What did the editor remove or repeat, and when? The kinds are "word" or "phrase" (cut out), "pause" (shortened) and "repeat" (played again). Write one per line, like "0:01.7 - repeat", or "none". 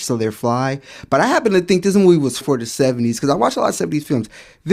0:02.4 - word